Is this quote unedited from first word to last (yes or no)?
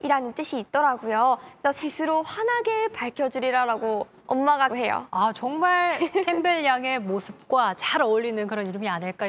no